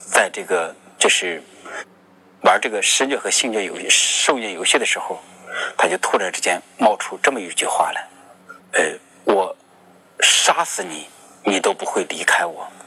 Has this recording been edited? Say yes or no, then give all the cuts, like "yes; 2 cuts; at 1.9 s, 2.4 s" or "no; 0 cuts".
yes; 1 cut; at 8.6 s